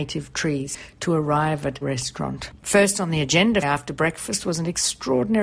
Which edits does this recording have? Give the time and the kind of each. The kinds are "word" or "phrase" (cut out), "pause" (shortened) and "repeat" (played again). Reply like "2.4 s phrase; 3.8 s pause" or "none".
1.8 s word; 2.6 s pause; 3.6 s phrase